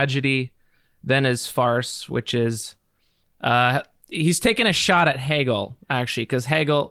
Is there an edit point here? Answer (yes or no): no